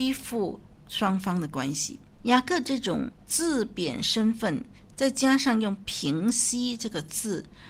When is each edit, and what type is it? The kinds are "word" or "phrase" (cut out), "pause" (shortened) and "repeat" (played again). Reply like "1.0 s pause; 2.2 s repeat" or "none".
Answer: 2.1 s pause